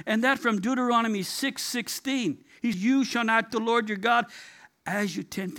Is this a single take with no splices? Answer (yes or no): no